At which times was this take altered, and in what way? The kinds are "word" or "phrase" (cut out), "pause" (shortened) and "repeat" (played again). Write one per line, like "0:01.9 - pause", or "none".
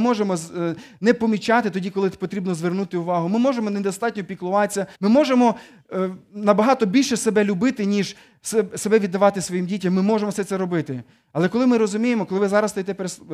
0:04.9 - pause